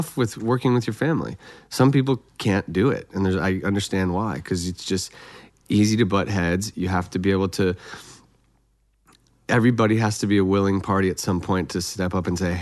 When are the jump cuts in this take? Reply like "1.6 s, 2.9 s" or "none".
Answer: 2.3 s